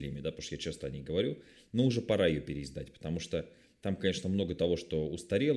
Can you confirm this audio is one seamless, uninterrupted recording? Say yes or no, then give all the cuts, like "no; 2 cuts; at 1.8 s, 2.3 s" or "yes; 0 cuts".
yes; 0 cuts